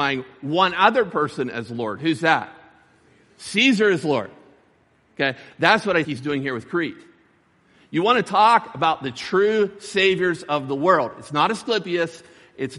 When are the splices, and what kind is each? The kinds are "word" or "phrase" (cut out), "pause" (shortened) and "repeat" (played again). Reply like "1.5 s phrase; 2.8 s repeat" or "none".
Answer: 6.0 s word

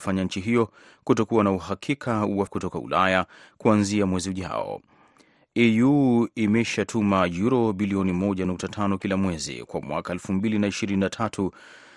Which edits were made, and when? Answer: 2.5 s word

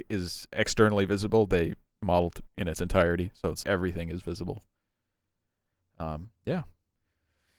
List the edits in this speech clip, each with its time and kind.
2.5 s word; 3.6 s word; 6.4 s pause

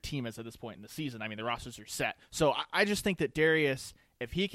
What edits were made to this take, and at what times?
2.2 s pause

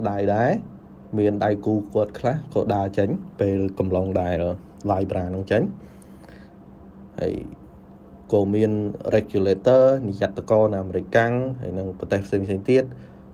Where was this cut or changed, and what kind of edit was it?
none

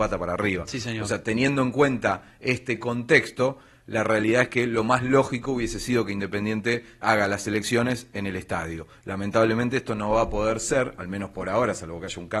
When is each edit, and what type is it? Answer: 7.0 s word

